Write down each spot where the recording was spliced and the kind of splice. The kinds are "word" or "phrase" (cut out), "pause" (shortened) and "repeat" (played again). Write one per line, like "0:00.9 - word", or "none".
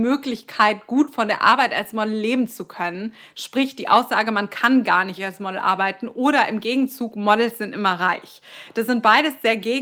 0:05.2 - word

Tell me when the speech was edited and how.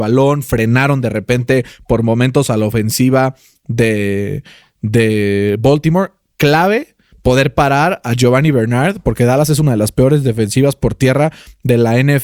none

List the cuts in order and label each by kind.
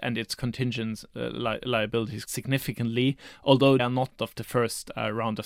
0:02.3 - word
0:03.8 - word
0:04.2 - word

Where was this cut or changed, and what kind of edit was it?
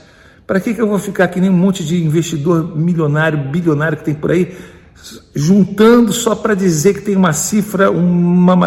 none

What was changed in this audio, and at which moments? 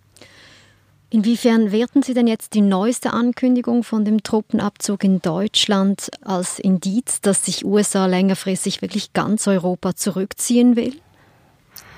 0:09.4 - word

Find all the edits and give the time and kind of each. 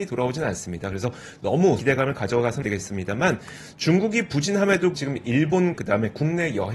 0:01.8 - word
0:02.6 - word
0:04.9 - word
0:05.7 - word

